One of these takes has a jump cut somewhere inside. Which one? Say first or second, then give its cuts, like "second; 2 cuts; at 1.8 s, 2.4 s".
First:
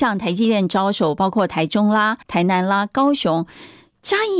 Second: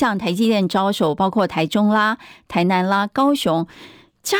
first; 1 cut; at 2.2 s